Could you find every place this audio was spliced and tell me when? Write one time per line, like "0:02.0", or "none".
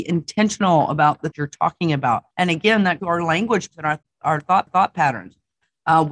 0:01.3
0:02.3
0:03.0
0:03.7
0:04.0
0:04.7